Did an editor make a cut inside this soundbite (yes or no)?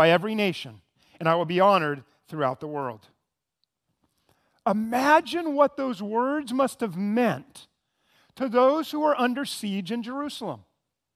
no